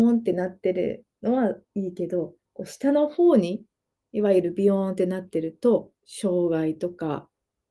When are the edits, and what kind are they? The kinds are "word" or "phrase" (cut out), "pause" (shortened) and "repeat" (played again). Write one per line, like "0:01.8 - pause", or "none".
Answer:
0:01.6 - pause
0:02.5 - pause
0:06.0 - pause